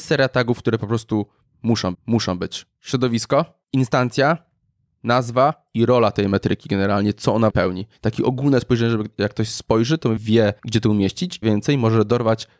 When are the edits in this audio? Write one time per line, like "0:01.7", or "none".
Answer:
0:01.9
0:03.6
0:07.5
0:10.2
0:10.6
0:11.4